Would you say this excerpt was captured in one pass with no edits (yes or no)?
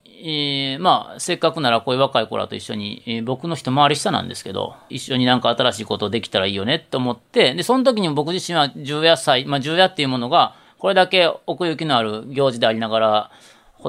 no